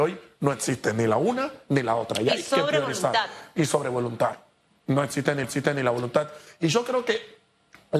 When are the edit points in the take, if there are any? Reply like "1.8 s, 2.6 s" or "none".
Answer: 5.4 s

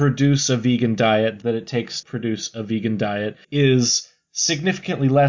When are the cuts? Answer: 1.4 s, 2.0 s, 3.4 s

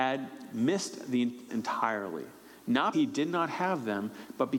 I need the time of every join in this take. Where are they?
1.5 s, 2.9 s

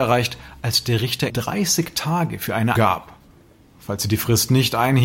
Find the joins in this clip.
1.3 s, 2.7 s

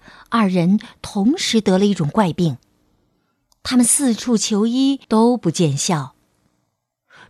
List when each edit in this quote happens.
5.0 s

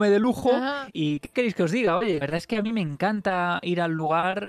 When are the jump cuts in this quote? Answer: 0.9 s, 2.2 s

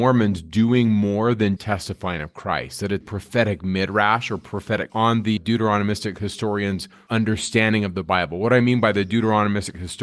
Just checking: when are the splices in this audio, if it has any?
1.6 s, 3.0 s, 4.9 s, 5.4 s

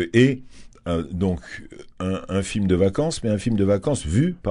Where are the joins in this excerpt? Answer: none

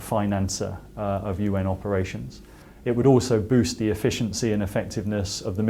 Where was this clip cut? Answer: none

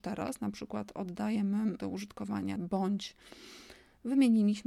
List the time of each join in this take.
1.8 s, 2.6 s

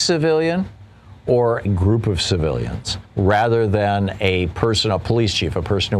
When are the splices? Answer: 1.7 s, 3.1 s

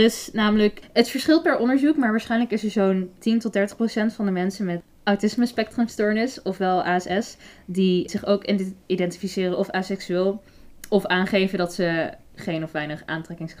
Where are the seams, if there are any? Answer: 3.2 s

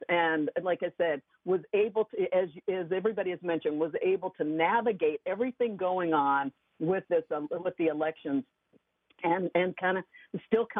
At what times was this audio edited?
none

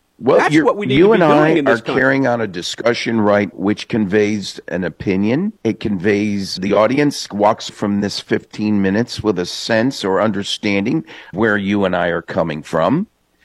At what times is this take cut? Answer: 3.5 s, 5.6 s, 6.6 s, 7.7 s, 11.3 s

